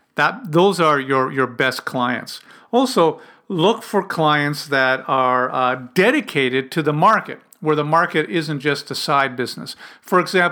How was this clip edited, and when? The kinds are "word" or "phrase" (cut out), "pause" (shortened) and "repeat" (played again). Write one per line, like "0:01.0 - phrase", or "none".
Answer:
none